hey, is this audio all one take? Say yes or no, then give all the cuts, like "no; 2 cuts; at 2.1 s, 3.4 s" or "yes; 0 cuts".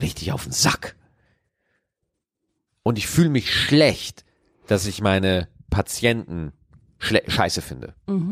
yes; 0 cuts